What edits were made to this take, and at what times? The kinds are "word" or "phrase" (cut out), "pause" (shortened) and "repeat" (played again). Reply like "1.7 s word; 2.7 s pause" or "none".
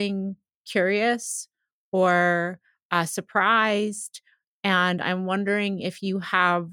none